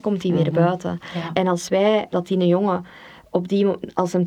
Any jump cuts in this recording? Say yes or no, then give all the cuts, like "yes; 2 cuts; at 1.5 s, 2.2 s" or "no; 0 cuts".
yes; 1 cut; at 2.1 s